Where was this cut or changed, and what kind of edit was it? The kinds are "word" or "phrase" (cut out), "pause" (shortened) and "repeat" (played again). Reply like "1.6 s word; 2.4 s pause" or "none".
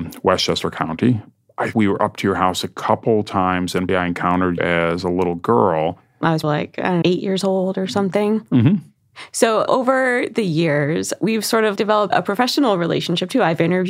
1.7 s word; 3.9 s word; 4.6 s word; 6.4 s word; 7.0 s word; 9.7 s word; 11.8 s word; 12.1 s word